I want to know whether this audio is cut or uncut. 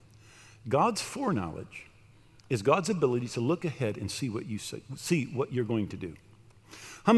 uncut